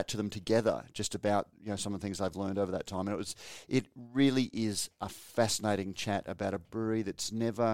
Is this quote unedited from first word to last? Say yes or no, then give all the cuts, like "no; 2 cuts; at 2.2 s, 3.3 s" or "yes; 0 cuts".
yes; 0 cuts